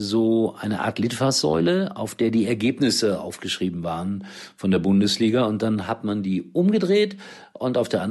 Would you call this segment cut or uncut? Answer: uncut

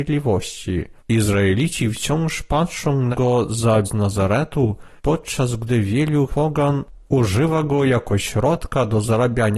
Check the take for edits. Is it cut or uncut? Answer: cut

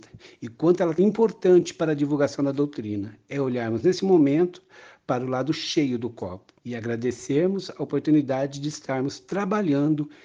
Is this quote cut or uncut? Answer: cut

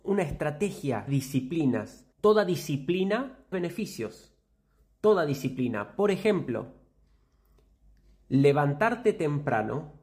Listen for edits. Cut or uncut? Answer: cut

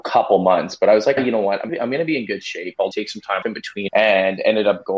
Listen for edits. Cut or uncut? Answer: cut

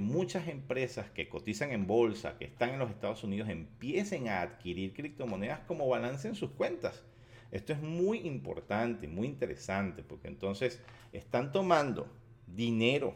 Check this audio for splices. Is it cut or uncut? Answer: uncut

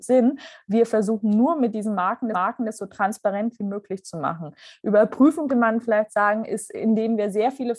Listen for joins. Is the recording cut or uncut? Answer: cut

